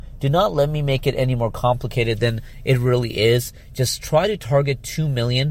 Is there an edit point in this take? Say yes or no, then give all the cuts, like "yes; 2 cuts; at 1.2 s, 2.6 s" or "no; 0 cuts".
no; 0 cuts